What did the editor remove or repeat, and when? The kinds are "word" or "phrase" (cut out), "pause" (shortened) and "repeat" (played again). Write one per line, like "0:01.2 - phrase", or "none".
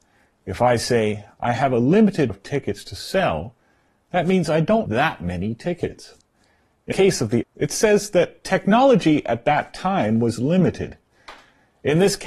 0:02.3 - word
0:04.9 - word
0:06.9 - word
0:07.4 - word